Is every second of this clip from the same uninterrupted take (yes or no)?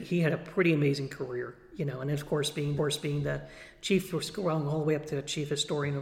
no